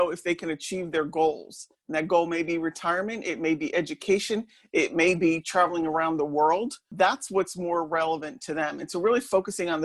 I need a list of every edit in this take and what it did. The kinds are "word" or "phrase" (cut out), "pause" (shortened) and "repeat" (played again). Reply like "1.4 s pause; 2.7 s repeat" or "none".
none

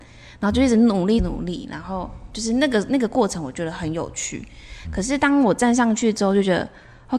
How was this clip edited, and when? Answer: 1.2 s phrase

